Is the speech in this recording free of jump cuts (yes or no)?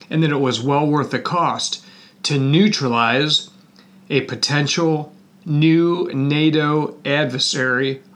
yes